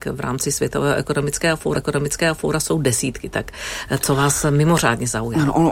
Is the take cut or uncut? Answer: cut